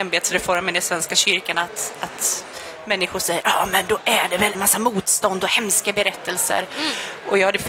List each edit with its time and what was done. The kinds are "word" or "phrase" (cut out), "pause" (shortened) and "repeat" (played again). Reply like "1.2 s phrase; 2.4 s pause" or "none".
4.5 s phrase